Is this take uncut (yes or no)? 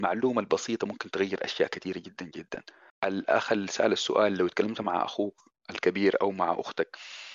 no